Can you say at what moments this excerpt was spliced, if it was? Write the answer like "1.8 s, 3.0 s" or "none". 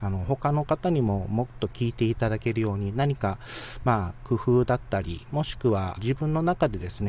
6.0 s